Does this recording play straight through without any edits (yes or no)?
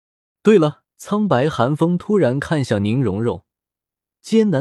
no